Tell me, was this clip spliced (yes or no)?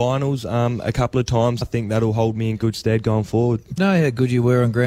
yes